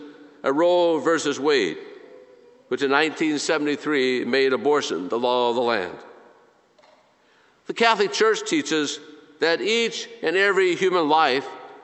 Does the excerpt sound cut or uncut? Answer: uncut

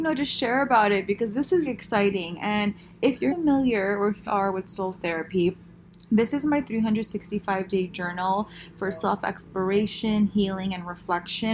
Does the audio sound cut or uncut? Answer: cut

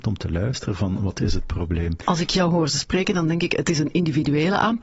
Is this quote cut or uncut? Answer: uncut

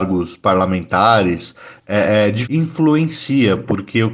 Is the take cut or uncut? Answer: cut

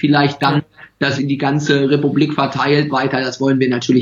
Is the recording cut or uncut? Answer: cut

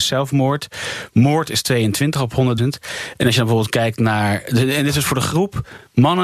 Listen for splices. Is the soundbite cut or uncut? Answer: cut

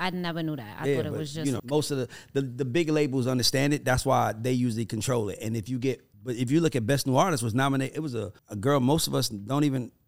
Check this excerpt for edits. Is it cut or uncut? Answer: cut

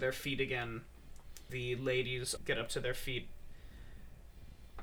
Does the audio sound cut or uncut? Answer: cut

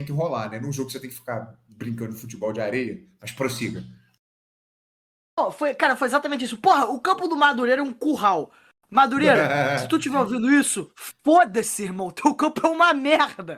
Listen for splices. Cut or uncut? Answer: uncut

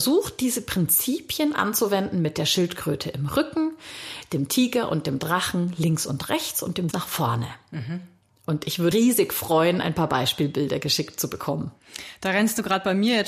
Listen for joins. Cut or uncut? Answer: cut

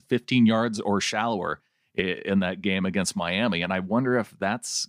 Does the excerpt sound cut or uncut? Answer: uncut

